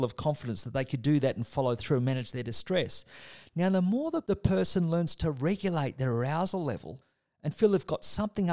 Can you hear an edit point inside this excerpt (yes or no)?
no